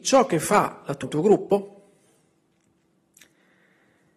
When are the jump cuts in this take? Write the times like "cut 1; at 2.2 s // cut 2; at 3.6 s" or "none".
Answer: cut 1; at 1.0 s